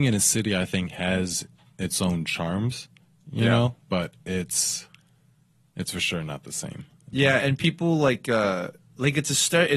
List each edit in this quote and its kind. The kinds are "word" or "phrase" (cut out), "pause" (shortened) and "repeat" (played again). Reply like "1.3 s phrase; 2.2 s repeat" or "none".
3.8 s pause